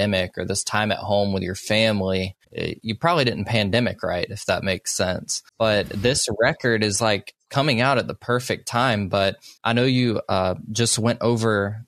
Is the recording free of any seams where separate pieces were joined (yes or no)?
no